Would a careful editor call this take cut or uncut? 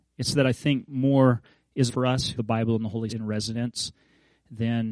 cut